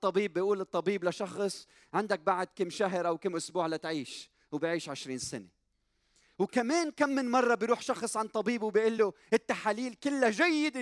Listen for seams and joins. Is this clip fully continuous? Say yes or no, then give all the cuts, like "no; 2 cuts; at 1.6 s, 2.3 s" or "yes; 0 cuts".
yes; 0 cuts